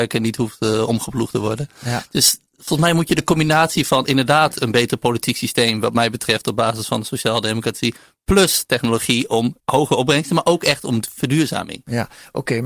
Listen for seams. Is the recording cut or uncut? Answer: cut